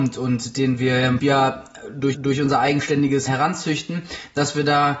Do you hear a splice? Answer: yes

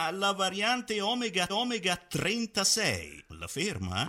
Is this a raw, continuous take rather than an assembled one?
no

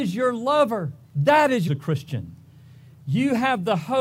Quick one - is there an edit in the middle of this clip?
yes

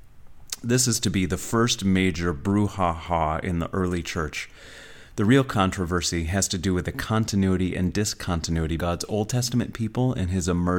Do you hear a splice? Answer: yes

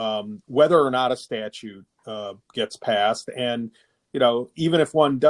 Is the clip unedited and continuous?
yes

